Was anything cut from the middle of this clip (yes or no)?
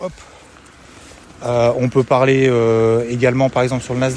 no